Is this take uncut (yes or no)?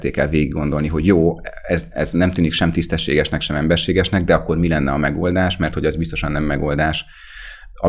yes